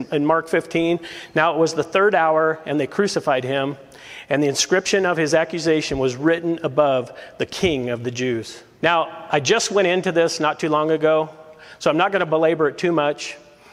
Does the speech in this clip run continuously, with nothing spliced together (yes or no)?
yes